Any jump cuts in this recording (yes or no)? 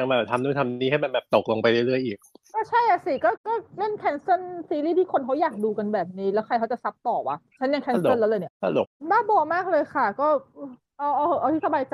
yes